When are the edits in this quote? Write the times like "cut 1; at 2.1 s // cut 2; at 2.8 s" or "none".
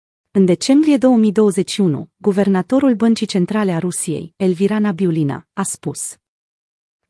none